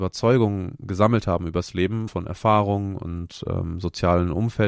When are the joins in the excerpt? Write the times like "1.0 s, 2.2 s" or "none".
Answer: 2.1 s